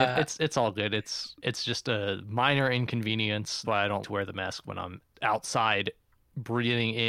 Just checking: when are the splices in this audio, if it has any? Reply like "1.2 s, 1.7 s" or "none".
1.4 s, 3.6 s, 4.0 s, 5.1 s